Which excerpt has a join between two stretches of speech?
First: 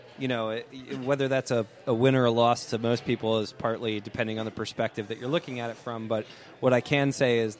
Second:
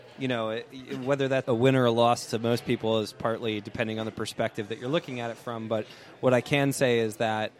second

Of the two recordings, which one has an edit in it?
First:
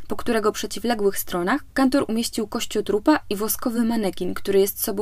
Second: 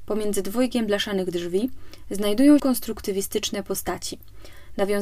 second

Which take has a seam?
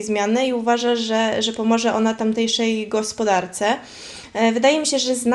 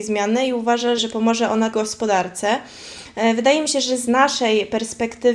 second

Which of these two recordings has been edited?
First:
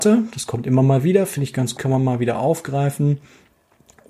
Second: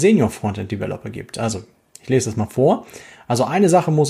first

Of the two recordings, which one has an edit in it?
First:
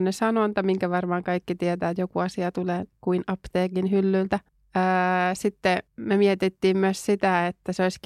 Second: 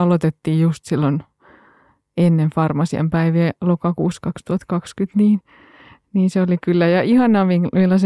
first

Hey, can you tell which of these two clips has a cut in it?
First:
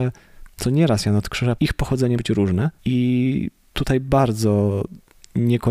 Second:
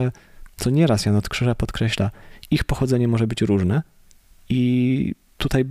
first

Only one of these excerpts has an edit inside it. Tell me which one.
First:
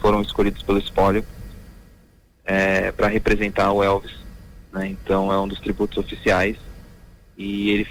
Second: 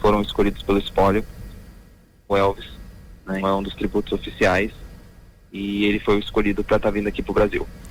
second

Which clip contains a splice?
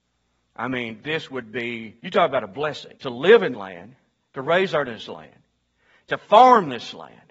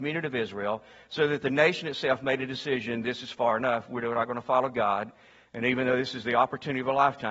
first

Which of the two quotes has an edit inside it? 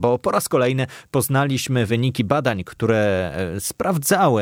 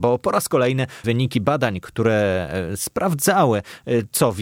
second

